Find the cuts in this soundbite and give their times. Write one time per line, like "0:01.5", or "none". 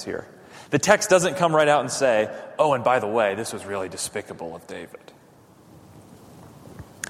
none